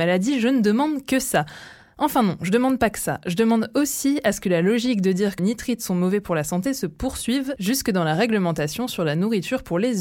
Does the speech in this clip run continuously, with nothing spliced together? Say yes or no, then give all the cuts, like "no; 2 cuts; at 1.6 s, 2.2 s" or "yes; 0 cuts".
no; 1 cut; at 5.4 s